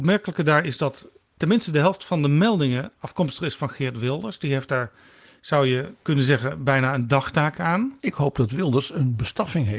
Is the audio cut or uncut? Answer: uncut